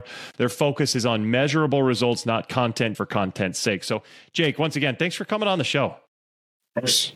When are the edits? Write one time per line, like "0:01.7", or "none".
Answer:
0:02.9